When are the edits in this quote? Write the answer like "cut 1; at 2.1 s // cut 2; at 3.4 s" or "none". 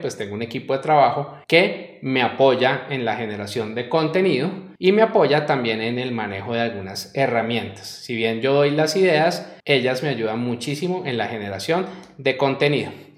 cut 1; at 1.4 s // cut 2; at 4.8 s // cut 3; at 9.6 s